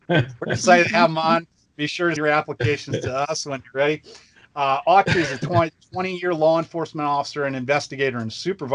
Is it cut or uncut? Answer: cut